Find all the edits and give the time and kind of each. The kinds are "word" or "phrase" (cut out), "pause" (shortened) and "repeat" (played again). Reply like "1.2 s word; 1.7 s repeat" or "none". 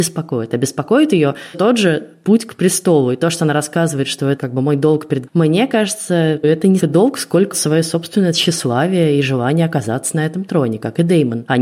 1.5 s word; 4.4 s word; 5.3 s word; 6.4 s word; 6.8 s word; 7.5 s word

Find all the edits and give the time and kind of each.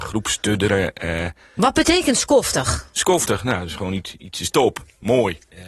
none

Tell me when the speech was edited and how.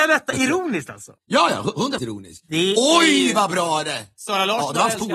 1.2 s pause; 2.0 s word

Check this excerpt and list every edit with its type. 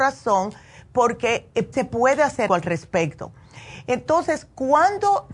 1.7 s word; 2.5 s word

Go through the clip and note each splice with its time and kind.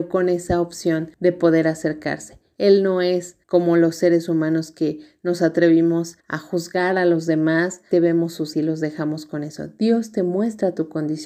1.1 s pause; 3.4 s pause; 6.2 s pause; 7.9 s word; 8.5 s word

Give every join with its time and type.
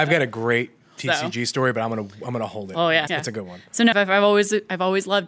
3.1 s word; 3.9 s word

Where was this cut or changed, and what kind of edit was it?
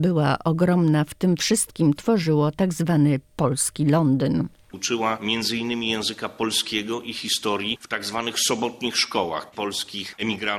1.9 s word; 9.5 s word

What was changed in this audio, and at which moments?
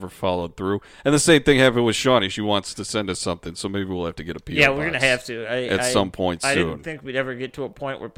none

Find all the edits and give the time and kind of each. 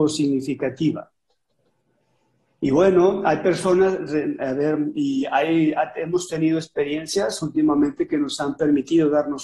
none

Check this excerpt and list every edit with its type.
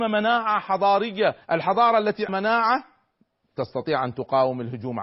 1.4 s pause; 2.3 s word

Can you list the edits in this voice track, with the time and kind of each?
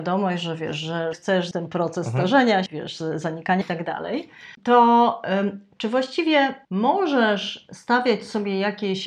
1.1 s word; 1.5 s word; 2.7 s word; 3.6 s word; 6.6 s pause

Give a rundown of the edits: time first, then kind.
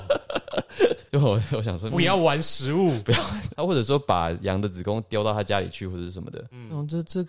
1.1 s word; 1.9 s word

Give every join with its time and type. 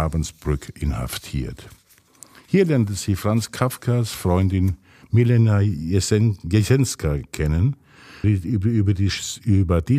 8.2 s word

